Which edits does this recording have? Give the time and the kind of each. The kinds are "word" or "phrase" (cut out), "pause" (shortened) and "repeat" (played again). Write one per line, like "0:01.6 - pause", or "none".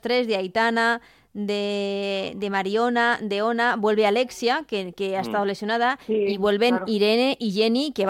none